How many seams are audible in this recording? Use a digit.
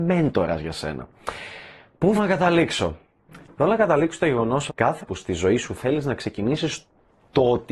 3